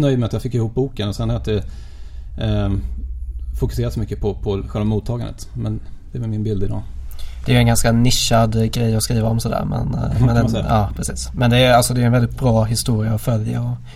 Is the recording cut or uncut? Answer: uncut